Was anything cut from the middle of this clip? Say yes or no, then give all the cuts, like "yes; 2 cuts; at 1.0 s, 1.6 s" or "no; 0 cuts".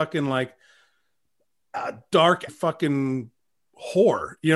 yes; 1 cut; at 2.5 s